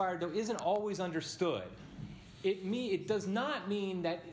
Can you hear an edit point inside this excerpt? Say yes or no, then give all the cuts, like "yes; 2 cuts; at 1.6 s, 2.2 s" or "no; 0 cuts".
no; 0 cuts